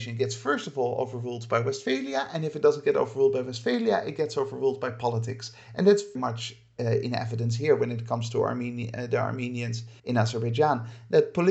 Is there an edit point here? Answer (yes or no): yes